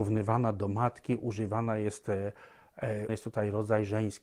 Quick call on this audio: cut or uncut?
cut